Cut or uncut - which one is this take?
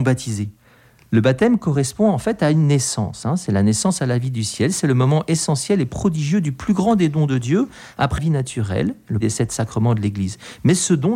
cut